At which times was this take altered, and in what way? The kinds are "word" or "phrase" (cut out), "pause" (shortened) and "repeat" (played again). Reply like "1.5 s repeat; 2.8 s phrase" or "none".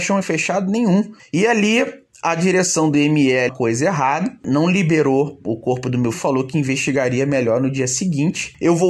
3.5 s phrase; 6.1 s phrase